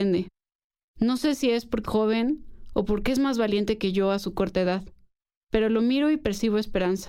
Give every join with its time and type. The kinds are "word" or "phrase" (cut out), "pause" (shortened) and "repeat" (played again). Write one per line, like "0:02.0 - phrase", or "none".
0:01.8 - word